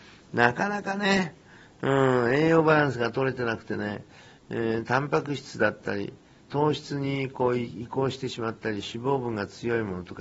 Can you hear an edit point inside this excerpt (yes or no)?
no